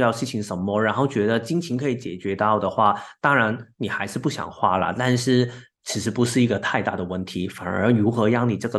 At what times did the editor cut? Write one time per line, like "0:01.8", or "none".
none